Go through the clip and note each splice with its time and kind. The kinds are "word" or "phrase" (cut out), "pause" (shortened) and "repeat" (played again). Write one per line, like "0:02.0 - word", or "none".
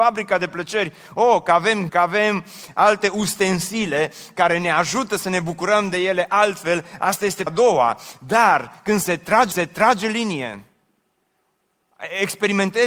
0:01.9 - word
0:07.5 - word
0:09.5 - repeat